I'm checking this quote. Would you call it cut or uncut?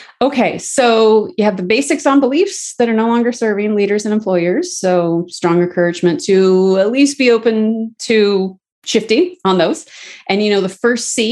uncut